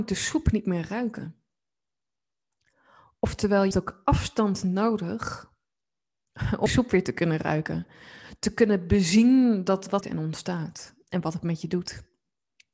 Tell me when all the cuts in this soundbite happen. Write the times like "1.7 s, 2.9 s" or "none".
3.7 s, 6.7 s, 10.0 s